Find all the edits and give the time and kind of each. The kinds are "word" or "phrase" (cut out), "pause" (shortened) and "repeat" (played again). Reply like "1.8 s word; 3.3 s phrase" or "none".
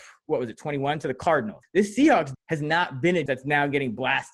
1.6 s word; 2.3 s word; 3.3 s word